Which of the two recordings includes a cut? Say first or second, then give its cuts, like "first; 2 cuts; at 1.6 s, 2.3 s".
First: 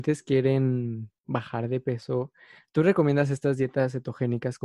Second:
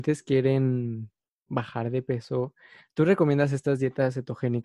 first; 1 cut; at 1.2 s